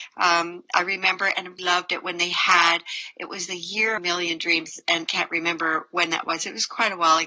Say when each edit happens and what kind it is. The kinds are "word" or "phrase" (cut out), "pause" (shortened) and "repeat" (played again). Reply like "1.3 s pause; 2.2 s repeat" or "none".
1.6 s word; 4.0 s phrase; 5.1 s word